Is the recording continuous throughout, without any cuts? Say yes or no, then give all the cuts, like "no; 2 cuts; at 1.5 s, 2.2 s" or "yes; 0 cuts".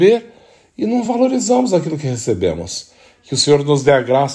yes; 0 cuts